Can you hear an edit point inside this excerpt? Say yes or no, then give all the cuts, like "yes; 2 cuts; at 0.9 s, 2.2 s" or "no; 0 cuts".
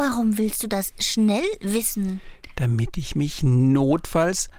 no; 0 cuts